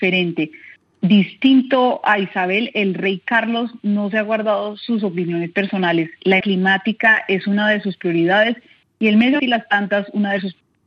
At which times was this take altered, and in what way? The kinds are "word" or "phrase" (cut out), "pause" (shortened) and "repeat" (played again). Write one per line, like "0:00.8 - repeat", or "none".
0:06.4 - word
0:09.4 - word